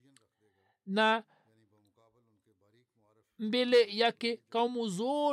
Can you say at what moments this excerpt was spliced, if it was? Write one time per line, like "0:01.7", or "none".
none